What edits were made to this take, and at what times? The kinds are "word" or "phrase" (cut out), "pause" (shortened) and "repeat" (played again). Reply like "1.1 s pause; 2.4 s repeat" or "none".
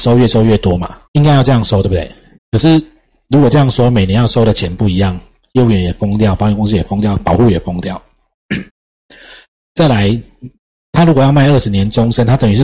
1.0 s pause; 2.3 s pause; 8.7 s pause; 10.7 s word